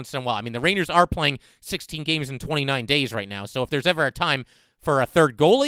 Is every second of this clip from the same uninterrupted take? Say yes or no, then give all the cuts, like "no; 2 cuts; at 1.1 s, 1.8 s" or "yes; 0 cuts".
yes; 0 cuts